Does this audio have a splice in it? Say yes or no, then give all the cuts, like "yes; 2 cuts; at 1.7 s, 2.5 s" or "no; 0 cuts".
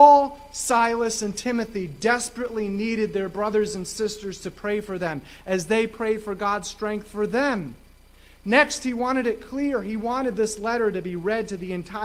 no; 0 cuts